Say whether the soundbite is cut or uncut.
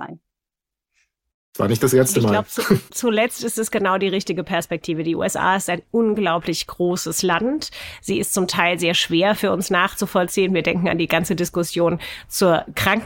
cut